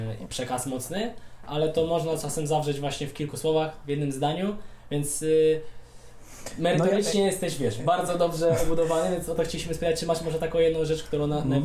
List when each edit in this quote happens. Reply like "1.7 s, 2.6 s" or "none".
none